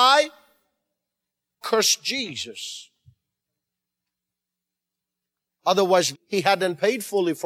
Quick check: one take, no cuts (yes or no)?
no